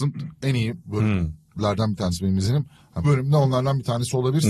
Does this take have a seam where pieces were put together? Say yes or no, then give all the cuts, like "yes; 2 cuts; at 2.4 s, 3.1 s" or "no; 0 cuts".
yes; 1 cut; at 3.0 s